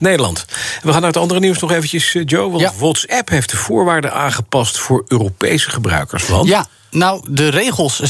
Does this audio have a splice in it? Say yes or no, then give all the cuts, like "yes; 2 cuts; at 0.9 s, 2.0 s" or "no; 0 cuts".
no; 0 cuts